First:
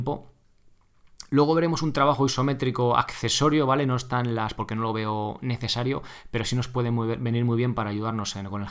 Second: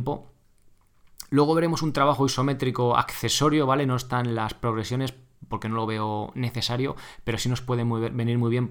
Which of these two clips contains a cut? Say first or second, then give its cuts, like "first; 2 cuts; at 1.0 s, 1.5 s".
first; 1 cut; at 4.5 s